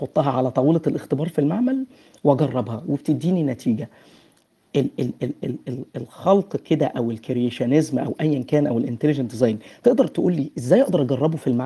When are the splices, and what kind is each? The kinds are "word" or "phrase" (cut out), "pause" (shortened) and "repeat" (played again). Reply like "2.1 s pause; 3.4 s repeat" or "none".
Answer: none

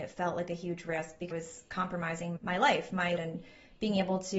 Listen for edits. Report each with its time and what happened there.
1.3 s word; 2.4 s word; 3.2 s word

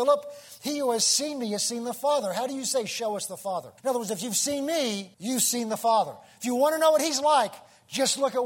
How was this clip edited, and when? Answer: 3.8 s pause; 5.1 s pause

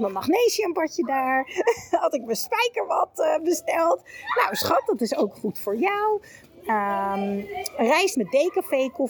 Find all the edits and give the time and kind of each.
8.1 s word

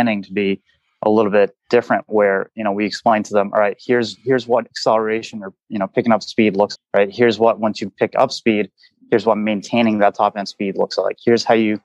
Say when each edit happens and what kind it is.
6.8 s word

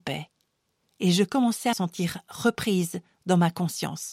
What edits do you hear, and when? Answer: 1.7 s word

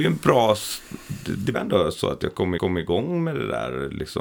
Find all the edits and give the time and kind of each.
1.5 s word; 2.6 s repeat

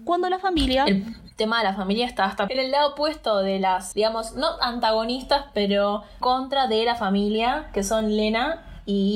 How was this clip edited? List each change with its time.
2.5 s word; 3.9 s word; 6.2 s phrase

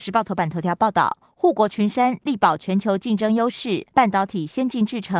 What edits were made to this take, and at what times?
3.9 s pause

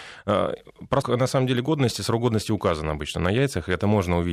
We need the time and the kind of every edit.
1.0 s word

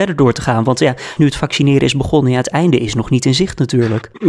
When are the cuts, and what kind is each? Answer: 1.2 s word

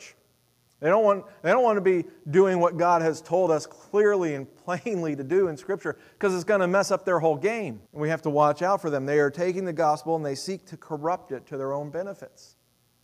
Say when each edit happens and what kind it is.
7.9 s pause

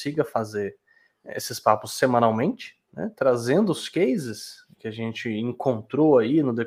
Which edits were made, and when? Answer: none

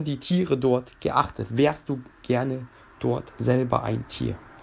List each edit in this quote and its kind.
none

